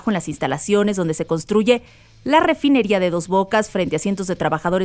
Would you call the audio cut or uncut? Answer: uncut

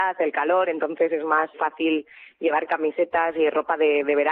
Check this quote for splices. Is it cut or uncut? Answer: cut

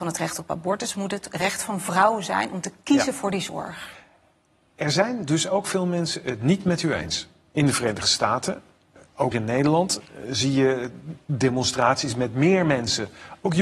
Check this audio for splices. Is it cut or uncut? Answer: cut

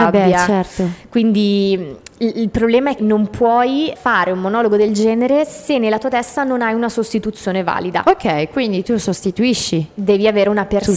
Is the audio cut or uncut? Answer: cut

